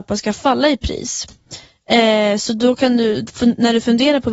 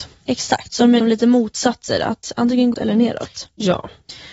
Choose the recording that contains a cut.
second; 2 cuts; at 1.0 s, 2.7 s

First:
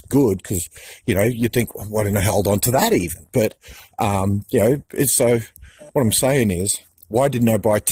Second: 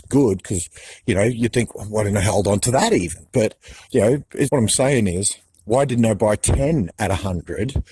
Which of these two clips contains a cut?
second; 2 cuts; at 3.9 s, 4.5 s

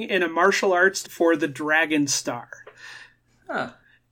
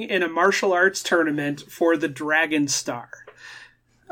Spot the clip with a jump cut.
first; 1 cut; at 1.0 s

